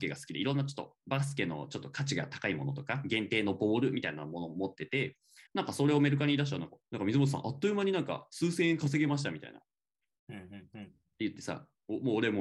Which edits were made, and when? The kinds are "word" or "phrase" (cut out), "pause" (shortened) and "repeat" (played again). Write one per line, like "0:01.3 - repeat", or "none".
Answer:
0:05.5 - pause
0:06.8 - word